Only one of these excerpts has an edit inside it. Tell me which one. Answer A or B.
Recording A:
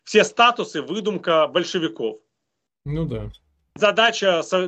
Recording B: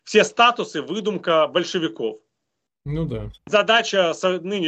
B